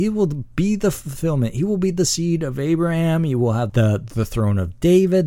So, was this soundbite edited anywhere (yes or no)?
yes